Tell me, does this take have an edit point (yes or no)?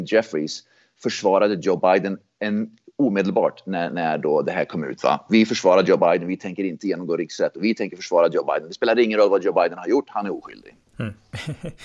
no